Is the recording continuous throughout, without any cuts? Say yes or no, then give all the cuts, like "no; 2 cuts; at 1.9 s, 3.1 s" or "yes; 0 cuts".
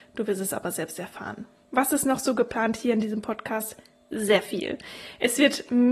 yes; 0 cuts